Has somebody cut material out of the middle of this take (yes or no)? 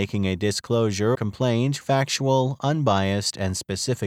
yes